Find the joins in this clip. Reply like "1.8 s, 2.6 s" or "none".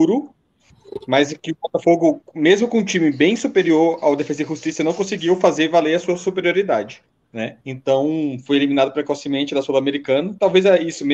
7.6 s